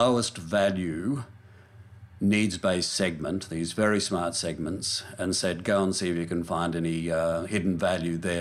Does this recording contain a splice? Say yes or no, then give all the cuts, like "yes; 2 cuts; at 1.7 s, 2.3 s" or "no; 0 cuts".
no; 0 cuts